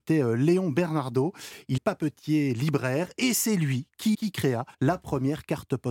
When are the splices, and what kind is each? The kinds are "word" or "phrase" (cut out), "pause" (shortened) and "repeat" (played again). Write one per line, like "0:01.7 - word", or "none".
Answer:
0:01.8 - word
0:04.1 - phrase
0:04.7 - pause